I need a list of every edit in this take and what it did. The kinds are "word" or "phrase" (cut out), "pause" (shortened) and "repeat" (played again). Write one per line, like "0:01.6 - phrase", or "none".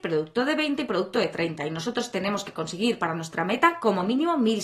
none